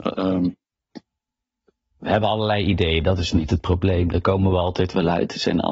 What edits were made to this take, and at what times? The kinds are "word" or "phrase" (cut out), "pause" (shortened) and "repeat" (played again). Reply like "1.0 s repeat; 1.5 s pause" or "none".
none